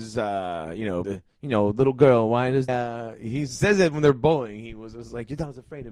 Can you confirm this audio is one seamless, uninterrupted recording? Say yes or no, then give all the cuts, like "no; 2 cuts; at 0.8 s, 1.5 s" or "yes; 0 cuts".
no; 2 cuts; at 1.0 s, 2.7 s